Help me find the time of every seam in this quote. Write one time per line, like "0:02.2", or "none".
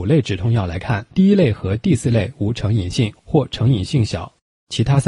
0:01.1